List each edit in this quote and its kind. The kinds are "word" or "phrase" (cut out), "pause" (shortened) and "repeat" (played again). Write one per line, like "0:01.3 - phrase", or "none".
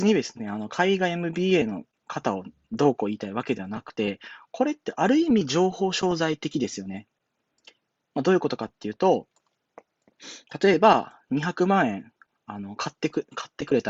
none